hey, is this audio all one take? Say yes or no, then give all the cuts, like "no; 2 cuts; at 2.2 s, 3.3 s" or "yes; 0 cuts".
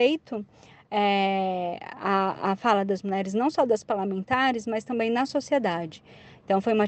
yes; 0 cuts